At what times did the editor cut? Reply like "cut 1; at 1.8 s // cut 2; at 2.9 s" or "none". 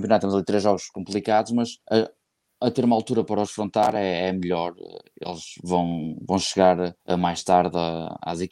cut 1; at 1.8 s // cut 2; at 7.0 s